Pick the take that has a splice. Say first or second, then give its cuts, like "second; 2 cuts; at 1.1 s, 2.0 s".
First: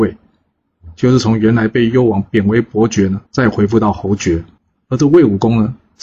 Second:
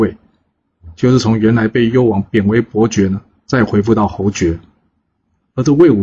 first; 2 cuts; at 3.3 s, 4.6 s